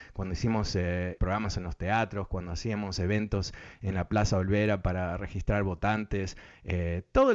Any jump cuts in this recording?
yes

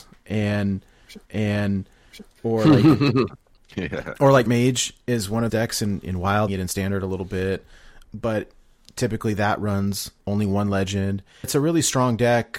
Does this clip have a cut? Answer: yes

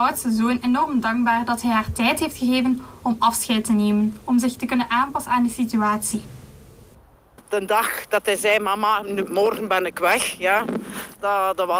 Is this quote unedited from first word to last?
no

